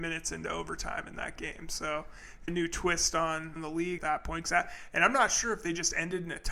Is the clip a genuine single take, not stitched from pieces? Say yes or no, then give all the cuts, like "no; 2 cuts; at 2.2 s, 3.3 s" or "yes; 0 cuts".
no; 3 cuts; at 2.5 s, 3.6 s, 4.0 s